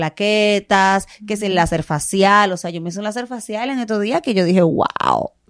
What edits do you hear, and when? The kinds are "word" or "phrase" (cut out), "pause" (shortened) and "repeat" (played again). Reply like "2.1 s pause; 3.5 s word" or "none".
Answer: none